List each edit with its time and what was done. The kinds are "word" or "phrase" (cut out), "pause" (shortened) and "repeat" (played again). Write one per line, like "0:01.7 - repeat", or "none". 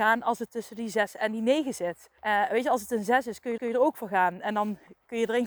0:02.2 - pause
0:03.6 - repeat